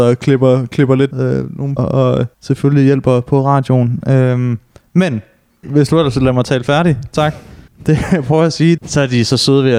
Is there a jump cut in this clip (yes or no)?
yes